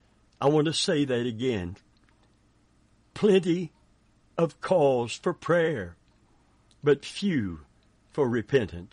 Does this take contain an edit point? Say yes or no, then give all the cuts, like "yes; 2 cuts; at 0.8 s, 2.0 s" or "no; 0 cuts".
no; 0 cuts